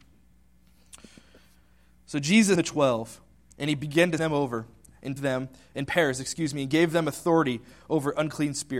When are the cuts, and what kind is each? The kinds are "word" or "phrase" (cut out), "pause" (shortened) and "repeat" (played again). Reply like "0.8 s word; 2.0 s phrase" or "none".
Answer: 2.6 s word; 4.2 s word; 5.2 s phrase

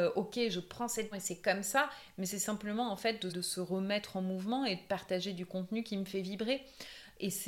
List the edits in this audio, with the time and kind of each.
1.1 s word; 3.3 s word

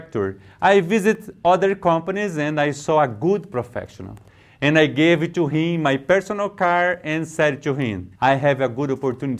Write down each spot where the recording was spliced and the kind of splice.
8.2 s pause

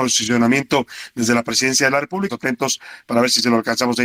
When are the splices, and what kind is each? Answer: 2.3 s word

